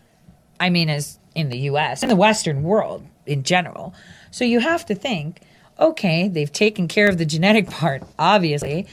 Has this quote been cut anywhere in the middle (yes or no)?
yes